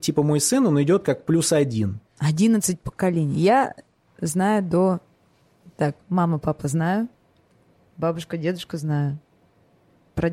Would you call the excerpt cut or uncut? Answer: uncut